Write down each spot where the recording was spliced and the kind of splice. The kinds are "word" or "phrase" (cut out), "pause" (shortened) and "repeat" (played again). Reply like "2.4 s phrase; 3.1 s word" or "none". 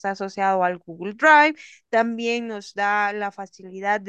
none